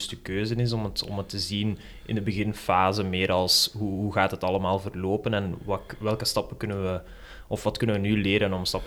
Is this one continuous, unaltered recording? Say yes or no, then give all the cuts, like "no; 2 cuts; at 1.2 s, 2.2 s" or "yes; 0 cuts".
yes; 0 cuts